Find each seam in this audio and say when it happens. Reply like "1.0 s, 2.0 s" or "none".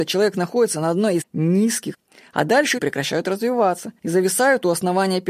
1.2 s, 1.9 s, 2.8 s, 4.0 s